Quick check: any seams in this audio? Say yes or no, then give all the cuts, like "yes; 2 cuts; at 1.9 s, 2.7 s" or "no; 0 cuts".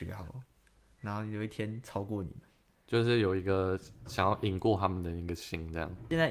no; 0 cuts